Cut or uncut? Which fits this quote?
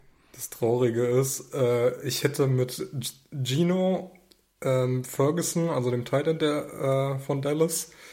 uncut